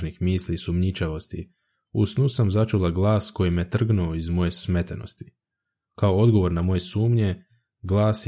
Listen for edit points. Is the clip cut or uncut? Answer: uncut